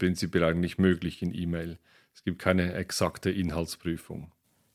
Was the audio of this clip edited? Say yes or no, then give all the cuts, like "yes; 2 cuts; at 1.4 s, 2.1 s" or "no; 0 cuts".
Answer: no; 0 cuts